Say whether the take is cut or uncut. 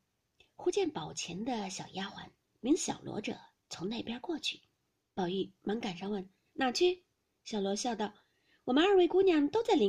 uncut